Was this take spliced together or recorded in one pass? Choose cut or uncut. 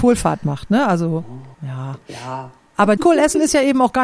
cut